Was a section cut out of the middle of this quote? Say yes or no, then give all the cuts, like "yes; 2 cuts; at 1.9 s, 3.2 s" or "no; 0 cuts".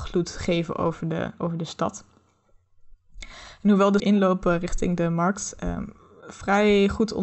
yes; 1 cut; at 4.0 s